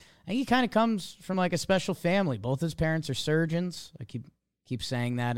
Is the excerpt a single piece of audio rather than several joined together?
yes; 0 cuts

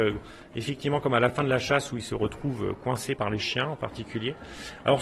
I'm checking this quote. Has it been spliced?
yes; 1 cut; at 3.2 s

